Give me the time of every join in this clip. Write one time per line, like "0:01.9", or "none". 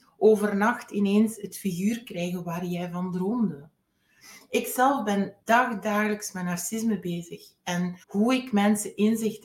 0:05.4
0:08.0